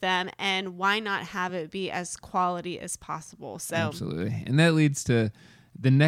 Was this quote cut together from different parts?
no; 0 cuts

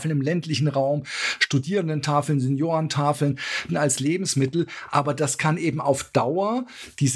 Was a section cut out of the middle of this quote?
yes; 1 cut; at 3.7 s

